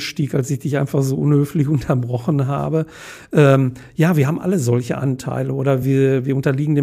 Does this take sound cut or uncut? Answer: uncut